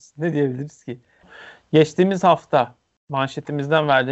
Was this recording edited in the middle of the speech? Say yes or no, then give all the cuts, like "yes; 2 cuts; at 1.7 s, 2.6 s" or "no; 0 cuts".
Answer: no; 0 cuts